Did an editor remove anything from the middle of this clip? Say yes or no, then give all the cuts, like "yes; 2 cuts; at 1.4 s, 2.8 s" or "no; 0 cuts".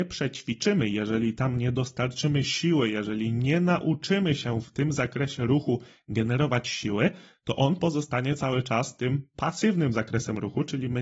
no; 0 cuts